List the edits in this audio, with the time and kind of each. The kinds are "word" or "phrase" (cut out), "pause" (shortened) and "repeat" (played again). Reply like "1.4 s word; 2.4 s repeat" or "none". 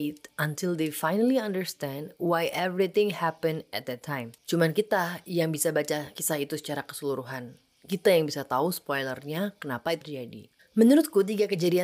4.4 s pause; 10.0 s word; 10.6 s pause

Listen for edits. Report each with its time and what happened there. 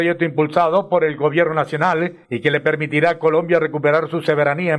2.2 s pause

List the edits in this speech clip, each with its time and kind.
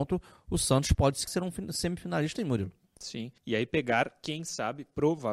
1.3 s phrase; 2.4 s word; 3.4 s pause

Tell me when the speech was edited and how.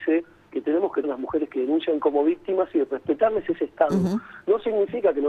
1.0 s word

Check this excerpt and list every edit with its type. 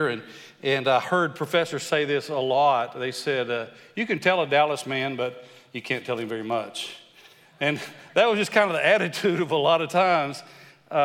none

